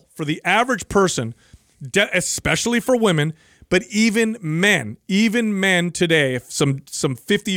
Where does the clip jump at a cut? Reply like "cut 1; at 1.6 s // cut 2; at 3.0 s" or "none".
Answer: none